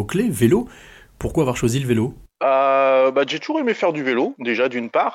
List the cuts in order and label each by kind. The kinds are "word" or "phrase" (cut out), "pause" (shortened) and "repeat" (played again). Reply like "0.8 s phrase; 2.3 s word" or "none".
2.3 s pause